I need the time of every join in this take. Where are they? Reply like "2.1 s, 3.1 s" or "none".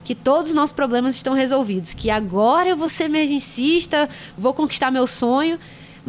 none